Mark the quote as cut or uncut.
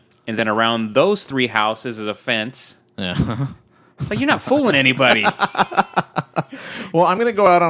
uncut